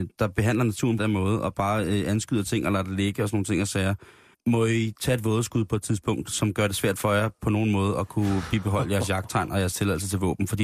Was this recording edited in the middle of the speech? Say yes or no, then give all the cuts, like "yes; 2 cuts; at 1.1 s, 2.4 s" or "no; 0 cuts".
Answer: yes; 2 cuts; at 1.0 s, 4.3 s